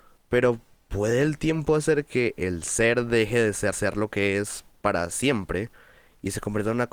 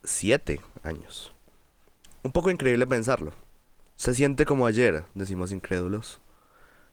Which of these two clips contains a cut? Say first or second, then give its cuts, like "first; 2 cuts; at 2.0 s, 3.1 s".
first; 1 cut; at 3.7 s